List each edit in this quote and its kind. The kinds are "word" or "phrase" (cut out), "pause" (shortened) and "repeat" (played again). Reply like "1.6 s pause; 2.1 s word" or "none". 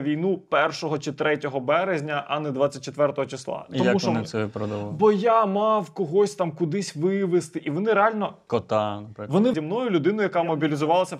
9.5 s phrase

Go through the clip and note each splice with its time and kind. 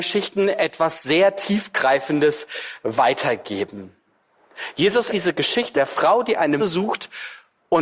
5.1 s word; 5.7 s word; 6.6 s word

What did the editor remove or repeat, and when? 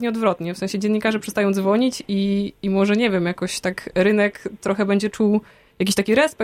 none

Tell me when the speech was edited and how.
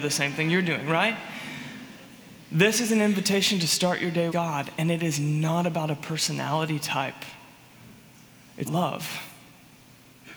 4.3 s word; 8.6 s word

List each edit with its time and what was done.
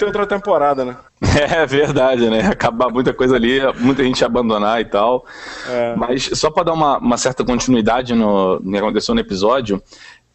1.1 s pause

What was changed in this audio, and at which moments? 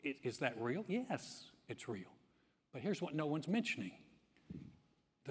none

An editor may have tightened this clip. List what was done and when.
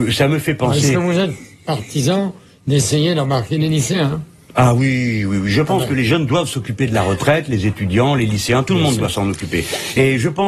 none

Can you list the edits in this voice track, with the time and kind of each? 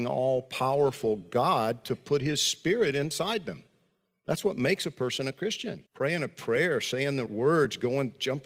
5.9 s pause; 7.3 s word

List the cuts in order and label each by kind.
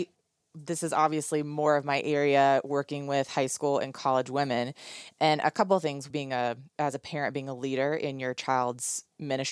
6.1 s phrase; 6.7 s pause

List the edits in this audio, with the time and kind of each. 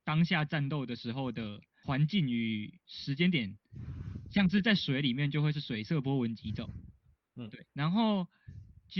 7.7 s pause

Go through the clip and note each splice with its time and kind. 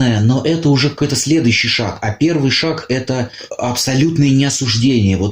none

